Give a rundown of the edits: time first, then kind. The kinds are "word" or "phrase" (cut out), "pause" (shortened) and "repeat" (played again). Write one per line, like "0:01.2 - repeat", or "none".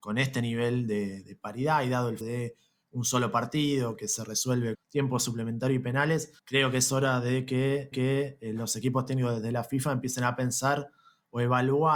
0:02.2 - word
0:04.7 - word
0:06.4 - pause
0:07.9 - repeat

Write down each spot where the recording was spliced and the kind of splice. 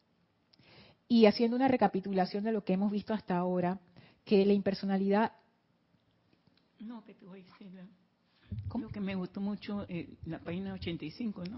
none

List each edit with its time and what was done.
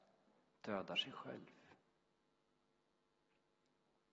none

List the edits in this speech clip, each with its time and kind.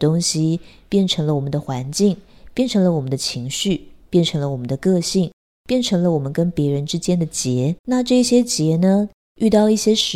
0:07.8 - pause

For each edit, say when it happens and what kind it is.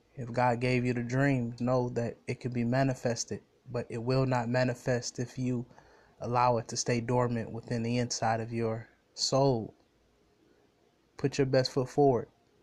0:01.6 - word

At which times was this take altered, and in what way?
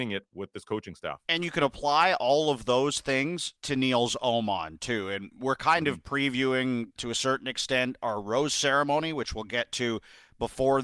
0:01.2 - pause
0:03.6 - pause
0:07.0 - word

